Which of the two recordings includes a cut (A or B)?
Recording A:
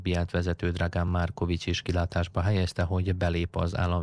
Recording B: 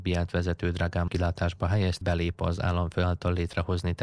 B